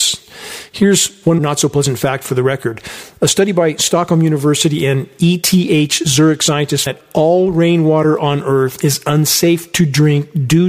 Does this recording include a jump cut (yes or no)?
yes